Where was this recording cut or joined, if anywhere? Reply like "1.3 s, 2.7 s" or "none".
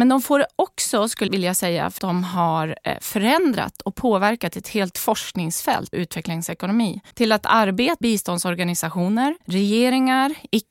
1.3 s, 2.0 s, 5.9 s, 7.1 s, 8.0 s, 9.4 s